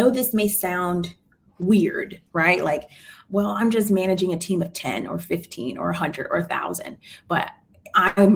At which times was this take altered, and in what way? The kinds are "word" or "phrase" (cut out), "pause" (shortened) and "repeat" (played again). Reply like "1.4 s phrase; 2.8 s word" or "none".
2.3 s pause

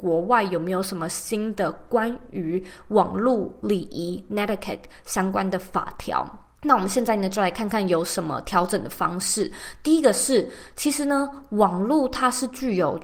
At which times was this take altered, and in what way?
6.6 s pause

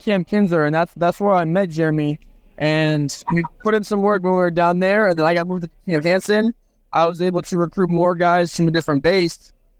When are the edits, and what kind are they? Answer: none

